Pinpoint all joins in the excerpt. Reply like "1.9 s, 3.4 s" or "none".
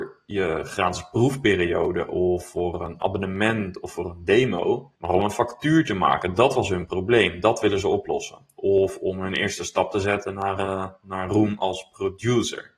5.0 s